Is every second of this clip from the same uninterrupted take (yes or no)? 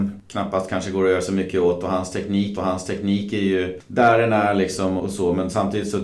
no